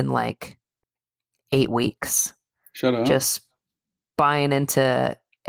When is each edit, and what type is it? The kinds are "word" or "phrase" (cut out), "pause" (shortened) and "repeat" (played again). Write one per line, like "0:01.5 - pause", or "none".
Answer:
none